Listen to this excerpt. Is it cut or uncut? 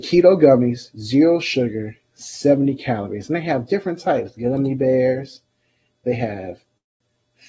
uncut